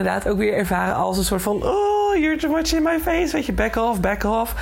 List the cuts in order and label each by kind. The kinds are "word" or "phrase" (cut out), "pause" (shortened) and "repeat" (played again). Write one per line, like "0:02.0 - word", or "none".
none